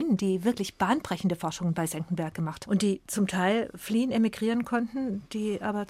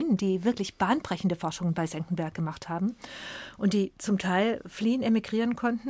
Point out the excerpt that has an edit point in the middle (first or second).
first